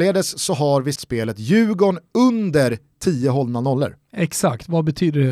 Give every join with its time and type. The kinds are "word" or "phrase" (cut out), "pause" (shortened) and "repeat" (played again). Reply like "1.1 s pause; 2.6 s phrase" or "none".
1.0 s word